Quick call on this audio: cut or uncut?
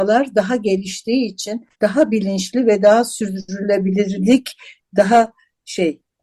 cut